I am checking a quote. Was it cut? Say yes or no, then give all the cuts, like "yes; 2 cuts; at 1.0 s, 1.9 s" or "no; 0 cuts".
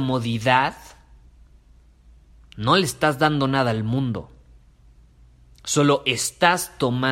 no; 0 cuts